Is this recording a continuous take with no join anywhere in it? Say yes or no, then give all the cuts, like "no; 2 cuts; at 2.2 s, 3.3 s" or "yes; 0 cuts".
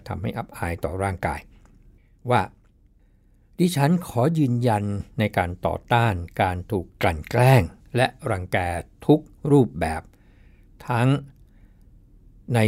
yes; 0 cuts